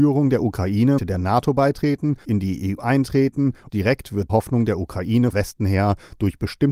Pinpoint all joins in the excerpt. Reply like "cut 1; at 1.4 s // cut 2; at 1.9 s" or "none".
cut 1; at 1.0 s // cut 2; at 2.2 s // cut 3; at 2.8 s // cut 4; at 3.7 s // cut 5; at 4.3 s // cut 6; at 5.3 s